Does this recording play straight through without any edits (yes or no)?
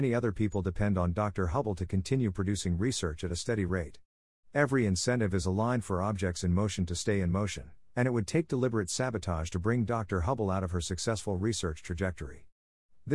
yes